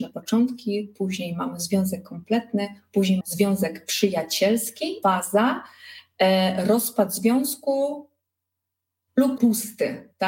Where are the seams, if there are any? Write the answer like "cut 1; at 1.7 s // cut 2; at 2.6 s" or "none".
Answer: cut 1; at 3.2 s // cut 2; at 5.0 s // cut 3; at 9.4 s

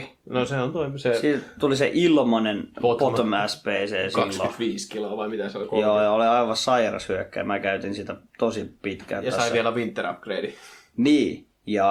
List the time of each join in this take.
none

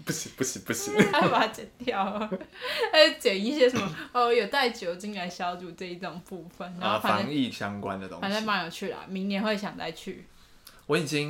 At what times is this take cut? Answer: cut 1; at 1.1 s

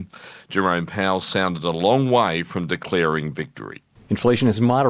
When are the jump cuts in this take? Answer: none

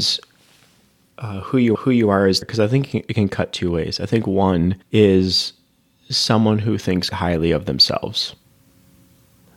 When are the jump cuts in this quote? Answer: cut 1; at 1.7 s // cut 2; at 2.4 s // cut 3; at 4.8 s // cut 4; at 7.1 s

